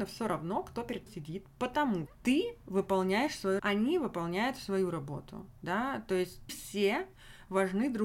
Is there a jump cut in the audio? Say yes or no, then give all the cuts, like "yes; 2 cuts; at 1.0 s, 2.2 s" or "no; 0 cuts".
yes; 4 cuts; at 1.1 s, 2.1 s, 3.6 s, 6.5 s